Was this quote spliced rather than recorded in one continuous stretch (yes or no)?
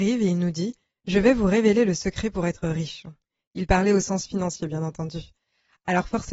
no